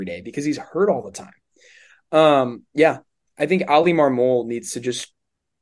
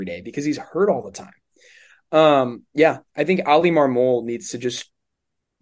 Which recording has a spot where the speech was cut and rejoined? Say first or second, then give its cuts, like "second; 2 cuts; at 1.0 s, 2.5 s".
second; 1 cut; at 3.1 s